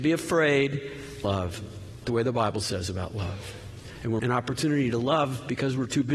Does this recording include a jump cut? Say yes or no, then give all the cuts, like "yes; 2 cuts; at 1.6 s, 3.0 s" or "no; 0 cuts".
yes; 3 cuts; at 1.2 s, 2.0 s, 4.2 s